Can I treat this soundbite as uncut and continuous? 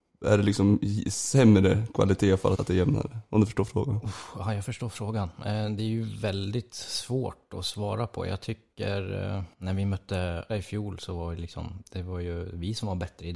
no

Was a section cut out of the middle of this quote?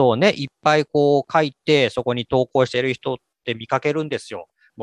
no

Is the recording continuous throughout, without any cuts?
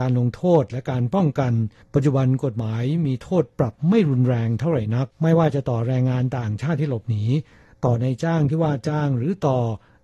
yes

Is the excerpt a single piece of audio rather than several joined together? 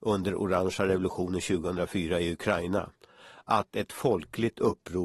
yes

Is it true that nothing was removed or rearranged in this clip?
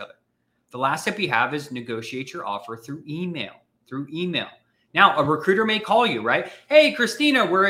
yes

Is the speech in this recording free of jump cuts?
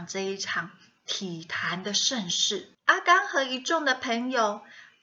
no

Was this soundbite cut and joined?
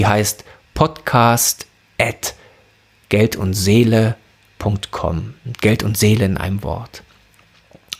no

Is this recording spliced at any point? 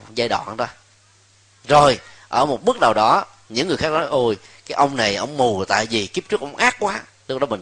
no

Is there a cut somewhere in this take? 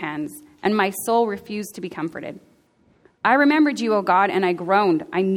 no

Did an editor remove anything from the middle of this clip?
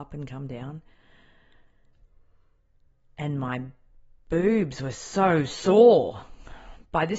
no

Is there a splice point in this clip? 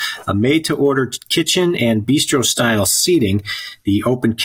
no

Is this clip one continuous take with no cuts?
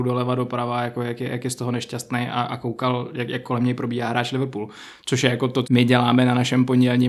no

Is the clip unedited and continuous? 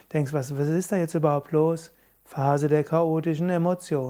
yes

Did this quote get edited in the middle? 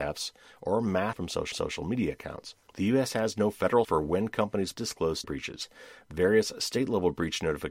yes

